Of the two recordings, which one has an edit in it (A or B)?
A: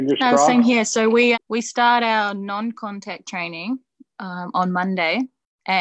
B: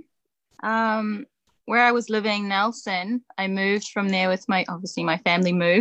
A